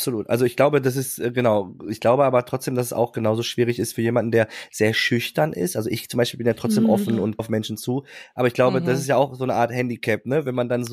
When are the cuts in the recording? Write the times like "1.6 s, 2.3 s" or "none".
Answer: 7.4 s